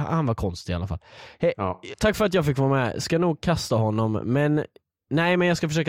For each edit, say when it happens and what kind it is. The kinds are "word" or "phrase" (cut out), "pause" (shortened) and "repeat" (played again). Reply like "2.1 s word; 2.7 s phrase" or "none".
none